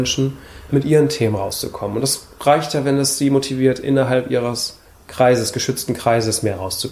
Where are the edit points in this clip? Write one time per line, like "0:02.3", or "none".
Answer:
none